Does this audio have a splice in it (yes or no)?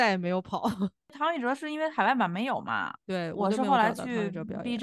yes